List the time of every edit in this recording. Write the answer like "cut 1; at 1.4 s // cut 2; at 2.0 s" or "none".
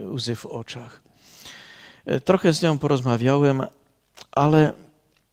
none